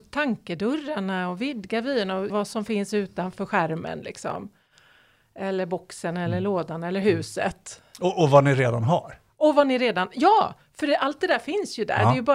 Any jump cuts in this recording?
yes; 1 cut; at 2.3 s

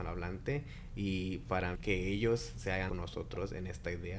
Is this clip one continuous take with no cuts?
no; 2 cuts; at 1.7 s, 2.9 s

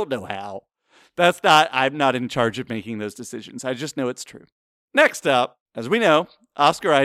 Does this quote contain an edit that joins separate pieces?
yes; 1 cut; at 5.6 s

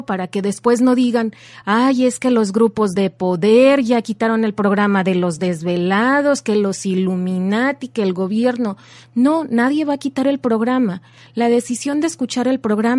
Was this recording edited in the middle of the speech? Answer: no; 0 cuts

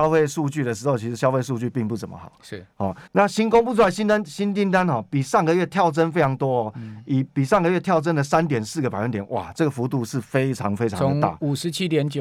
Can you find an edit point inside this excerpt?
yes; 1 cut; at 3.1 s

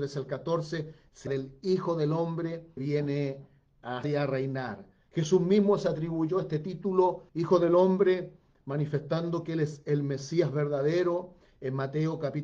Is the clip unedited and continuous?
no; 4 cuts; at 1.3 s, 2.8 s, 4.0 s, 7.3 s

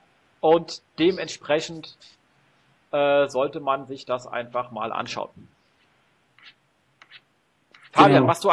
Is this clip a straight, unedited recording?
yes; 0 cuts

